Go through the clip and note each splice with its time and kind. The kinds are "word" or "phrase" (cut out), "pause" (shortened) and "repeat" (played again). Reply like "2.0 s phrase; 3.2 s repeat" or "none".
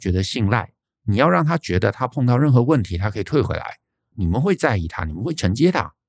none